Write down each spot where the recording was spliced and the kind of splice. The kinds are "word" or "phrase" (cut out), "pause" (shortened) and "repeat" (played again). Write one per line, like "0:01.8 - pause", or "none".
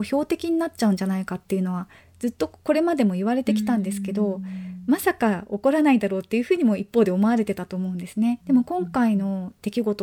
0:08.4 - phrase